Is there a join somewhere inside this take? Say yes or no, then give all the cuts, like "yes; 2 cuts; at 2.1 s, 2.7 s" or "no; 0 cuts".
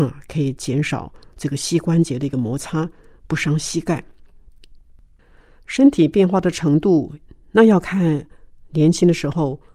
no; 0 cuts